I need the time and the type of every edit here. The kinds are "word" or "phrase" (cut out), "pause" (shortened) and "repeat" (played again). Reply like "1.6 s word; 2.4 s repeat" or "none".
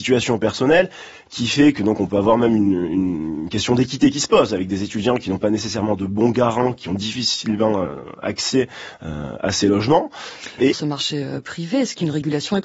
10.7 s phrase